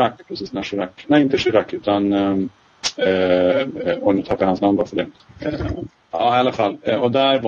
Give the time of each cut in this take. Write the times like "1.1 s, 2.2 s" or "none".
none

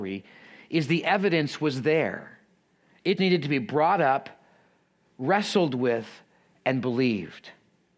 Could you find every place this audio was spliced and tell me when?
3.2 s

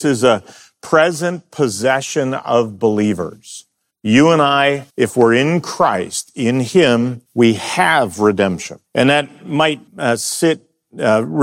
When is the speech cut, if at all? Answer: 3.9 s, 4.9 s, 7.3 s, 8.9 s, 9.9 s

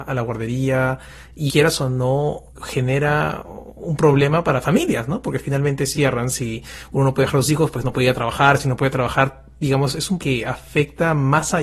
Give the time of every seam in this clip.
1.5 s, 2.5 s, 5.9 s, 10.2 s

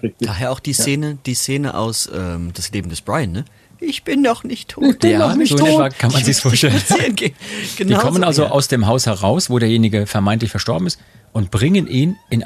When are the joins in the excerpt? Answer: none

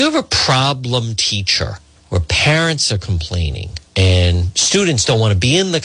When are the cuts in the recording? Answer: 2.0 s, 3.9 s

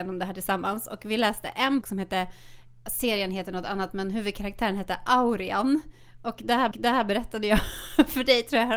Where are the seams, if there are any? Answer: 1.8 s, 6.7 s

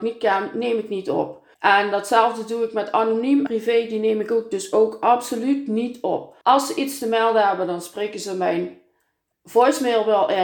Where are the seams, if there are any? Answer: 1.5 s, 3.5 s, 6.4 s

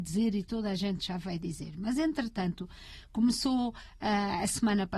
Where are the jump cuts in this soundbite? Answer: none

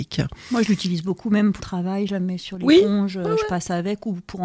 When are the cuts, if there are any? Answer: 1.6 s

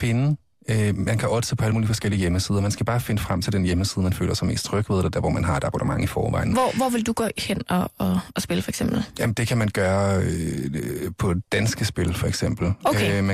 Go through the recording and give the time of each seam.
none

